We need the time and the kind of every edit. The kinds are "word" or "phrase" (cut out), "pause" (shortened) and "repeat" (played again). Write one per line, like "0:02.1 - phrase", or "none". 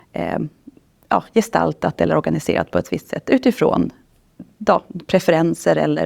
none